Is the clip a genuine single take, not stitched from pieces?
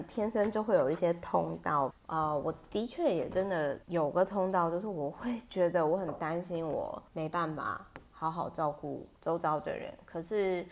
no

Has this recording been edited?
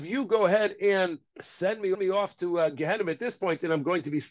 yes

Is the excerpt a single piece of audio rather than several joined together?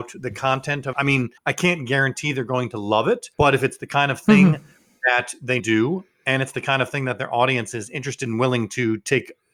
no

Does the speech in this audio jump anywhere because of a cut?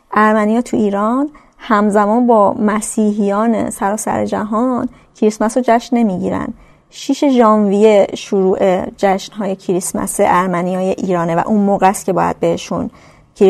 no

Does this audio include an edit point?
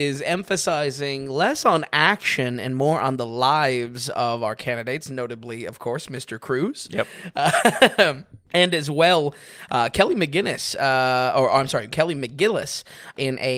no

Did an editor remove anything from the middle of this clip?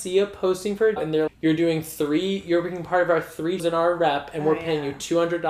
yes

